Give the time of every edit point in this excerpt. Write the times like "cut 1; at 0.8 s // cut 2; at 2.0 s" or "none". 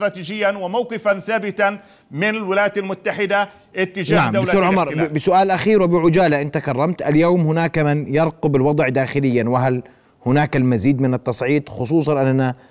none